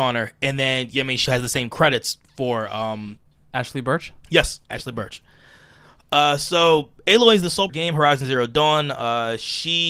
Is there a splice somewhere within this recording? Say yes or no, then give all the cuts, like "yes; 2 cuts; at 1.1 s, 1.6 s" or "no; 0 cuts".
yes; 4 cuts; at 1.3 s, 3.3 s, 4.6 s, 7.7 s